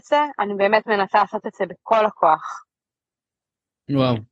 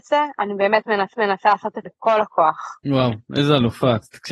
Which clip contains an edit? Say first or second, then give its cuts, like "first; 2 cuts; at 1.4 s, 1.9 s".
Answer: second; 3 cuts; at 1.1 s, 1.8 s, 2.8 s